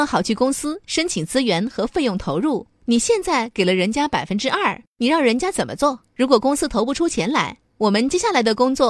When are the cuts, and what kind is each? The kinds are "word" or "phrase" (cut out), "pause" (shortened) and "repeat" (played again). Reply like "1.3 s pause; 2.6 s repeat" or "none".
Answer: none

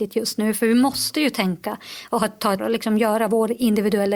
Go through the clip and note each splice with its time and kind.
2.6 s word

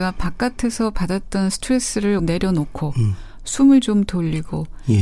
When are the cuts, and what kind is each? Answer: 2.2 s word

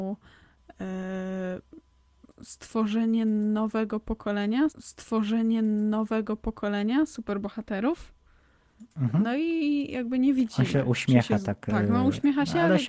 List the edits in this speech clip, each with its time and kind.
4.7 s repeat

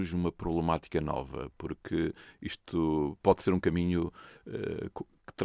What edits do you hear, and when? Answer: none

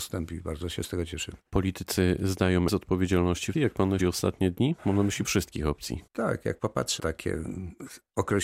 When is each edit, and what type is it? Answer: 1.5 s pause; 2.7 s word; 3.5 s phrase; 4.0 s word; 4.8 s pause; 5.2 s word; 6.1 s pause; 7.0 s word

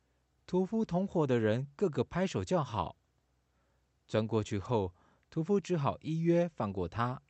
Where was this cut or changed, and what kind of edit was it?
none

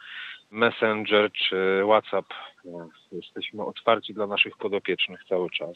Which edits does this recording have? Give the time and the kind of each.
none

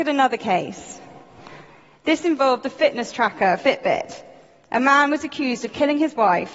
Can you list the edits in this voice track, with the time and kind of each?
none

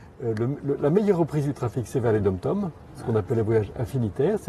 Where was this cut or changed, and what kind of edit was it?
none

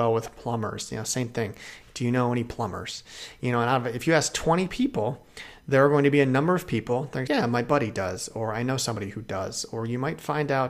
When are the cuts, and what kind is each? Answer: 7.3 s word

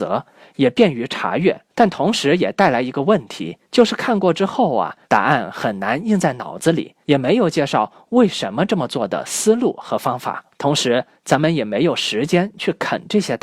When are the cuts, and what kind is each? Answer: 1.7 s pause; 3.6 s pause; 5.0 s pause; 7.0 s pause; 10.5 s pause

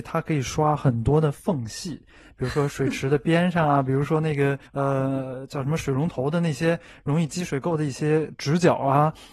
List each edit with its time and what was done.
4.7 s pause

